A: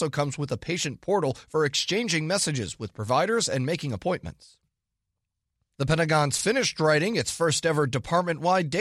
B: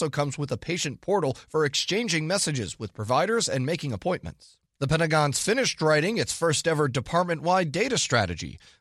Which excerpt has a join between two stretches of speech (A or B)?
B